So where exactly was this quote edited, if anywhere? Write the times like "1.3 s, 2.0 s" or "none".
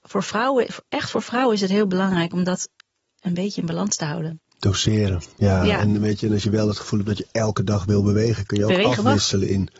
none

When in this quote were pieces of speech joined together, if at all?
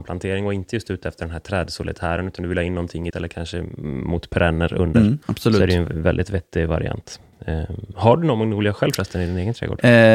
3.1 s, 5.2 s

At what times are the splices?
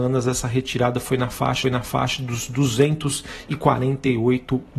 1.6 s

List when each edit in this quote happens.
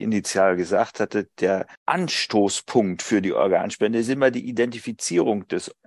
1.8 s

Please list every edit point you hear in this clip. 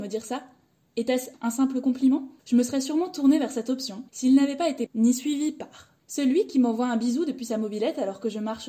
1.3 s, 2.4 s, 4.1 s, 4.9 s, 6.0 s

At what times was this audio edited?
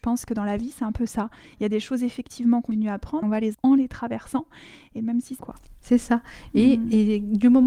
2.7 s, 3.2 s, 3.5 s, 5.4 s

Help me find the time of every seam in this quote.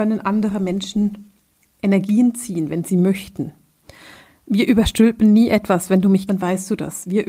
6.3 s

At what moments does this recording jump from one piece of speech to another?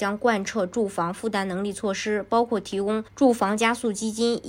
3.1 s

